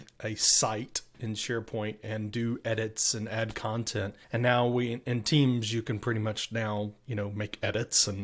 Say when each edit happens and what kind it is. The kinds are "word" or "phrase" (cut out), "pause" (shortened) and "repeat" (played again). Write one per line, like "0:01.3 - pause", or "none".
0:04.2 - pause